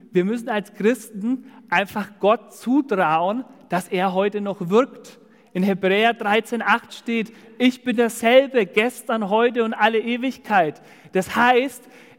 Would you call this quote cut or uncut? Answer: uncut